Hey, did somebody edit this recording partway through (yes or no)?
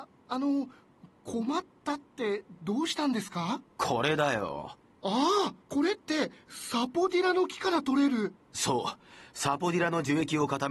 yes